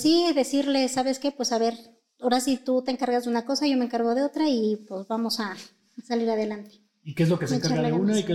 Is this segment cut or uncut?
uncut